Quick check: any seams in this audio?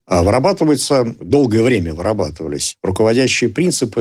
no; 0 cuts

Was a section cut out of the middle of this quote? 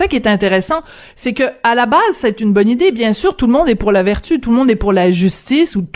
no; 0 cuts

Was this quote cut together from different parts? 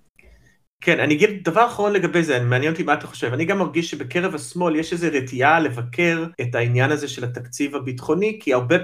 yes; 1 cut; at 6.3 s

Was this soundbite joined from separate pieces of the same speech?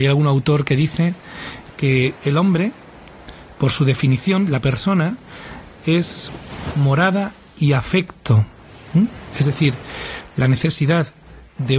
no; 0 cuts

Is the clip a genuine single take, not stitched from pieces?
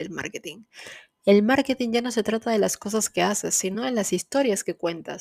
yes; 0 cuts

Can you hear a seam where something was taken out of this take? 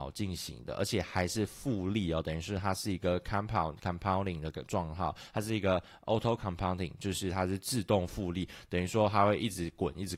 no; 0 cuts

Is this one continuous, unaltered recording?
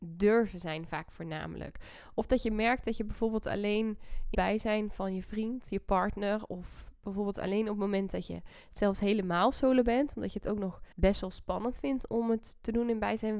no; 2 cuts; at 4.3 s, 10.9 s

